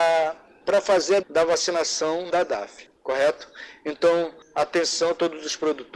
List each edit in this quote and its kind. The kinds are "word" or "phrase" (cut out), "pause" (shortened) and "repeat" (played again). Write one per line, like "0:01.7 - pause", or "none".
0:01.2 - word
0:02.3 - word